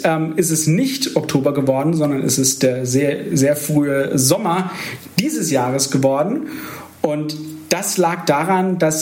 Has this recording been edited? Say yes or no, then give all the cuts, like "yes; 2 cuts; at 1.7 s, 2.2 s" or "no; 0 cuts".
no; 0 cuts